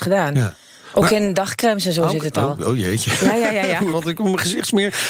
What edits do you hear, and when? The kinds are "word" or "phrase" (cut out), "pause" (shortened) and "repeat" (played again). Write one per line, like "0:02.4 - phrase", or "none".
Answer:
0:03.9 - word